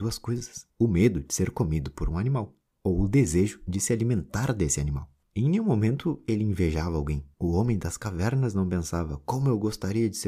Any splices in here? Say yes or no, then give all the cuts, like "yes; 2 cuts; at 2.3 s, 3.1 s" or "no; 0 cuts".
no; 0 cuts